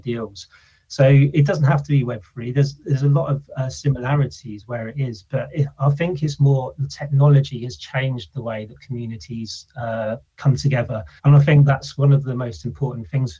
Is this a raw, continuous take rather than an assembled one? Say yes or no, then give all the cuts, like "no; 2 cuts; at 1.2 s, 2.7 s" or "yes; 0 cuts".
no; 2 cuts; at 10.3 s, 11.2 s